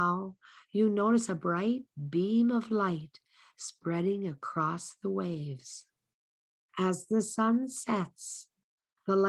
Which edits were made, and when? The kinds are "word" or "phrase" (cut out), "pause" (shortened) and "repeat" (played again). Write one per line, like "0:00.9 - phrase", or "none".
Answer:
none

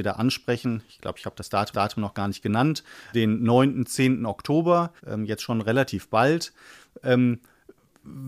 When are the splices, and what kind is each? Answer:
0:01.7 - repeat
0:03.1 - word
0:05.0 - pause

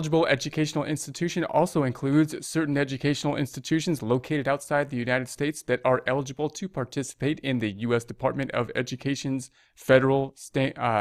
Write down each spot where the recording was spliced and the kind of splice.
none

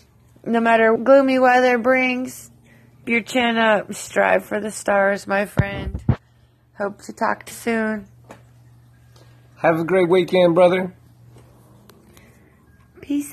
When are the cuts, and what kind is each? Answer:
0:01.0 - word
0:03.0 - word
0:07.5 - word

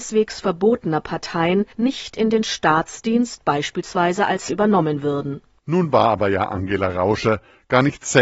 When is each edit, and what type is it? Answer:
0:01.7 - pause
0:04.5 - word

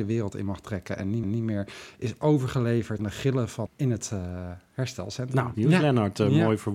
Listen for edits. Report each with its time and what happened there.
0:01.2 - repeat
0:03.0 - word
0:03.7 - phrase
0:05.5 - phrase

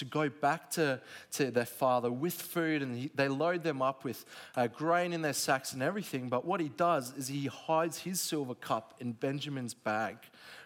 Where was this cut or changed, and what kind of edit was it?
none

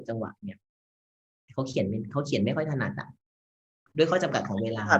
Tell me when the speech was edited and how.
none

